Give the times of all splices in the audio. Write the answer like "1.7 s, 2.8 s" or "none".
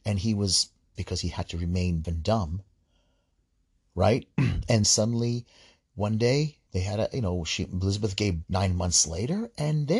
1.0 s, 2.0 s, 4.8 s, 6.7 s, 8.4 s